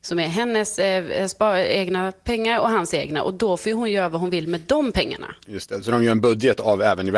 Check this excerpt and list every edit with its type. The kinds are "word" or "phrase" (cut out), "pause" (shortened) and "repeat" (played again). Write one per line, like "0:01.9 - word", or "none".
none

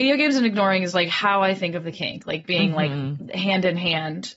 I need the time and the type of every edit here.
none

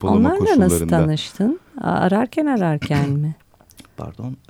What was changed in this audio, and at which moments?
none

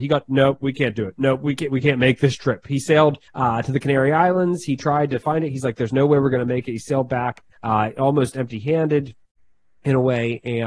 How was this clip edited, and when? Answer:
0:03.3 - pause
0:07.5 - pause

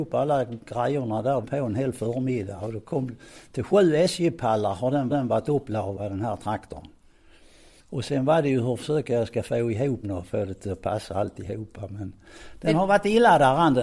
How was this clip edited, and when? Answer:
0:01.4 - phrase
0:05.1 - repeat
0:10.0 - word

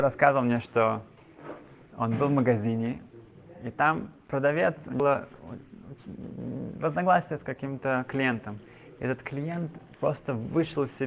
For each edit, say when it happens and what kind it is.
none

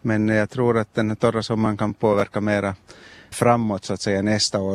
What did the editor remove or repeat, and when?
0:03.3 - word

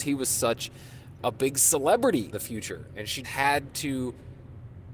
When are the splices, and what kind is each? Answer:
0:01.2 - word
0:02.3 - word
0:03.2 - word

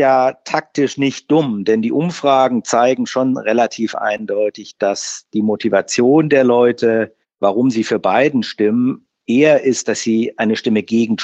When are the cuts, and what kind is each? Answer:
0:07.2 - pause

